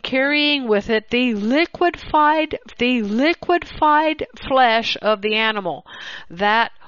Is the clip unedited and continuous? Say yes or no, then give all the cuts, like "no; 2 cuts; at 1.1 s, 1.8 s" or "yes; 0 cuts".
no; 1 cut; at 2.7 s